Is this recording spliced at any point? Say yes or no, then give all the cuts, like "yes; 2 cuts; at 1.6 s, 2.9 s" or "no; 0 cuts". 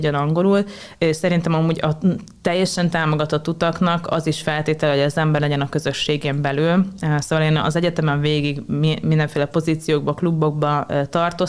yes; 1 cut; at 5.4 s